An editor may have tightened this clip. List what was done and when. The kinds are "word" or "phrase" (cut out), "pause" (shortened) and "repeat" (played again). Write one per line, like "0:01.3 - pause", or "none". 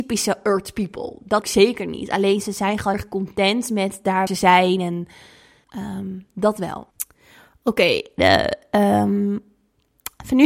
0:01.4 - word
0:02.9 - word
0:04.3 - word
0:05.6 - word
0:06.9 - pause
0:08.2 - phrase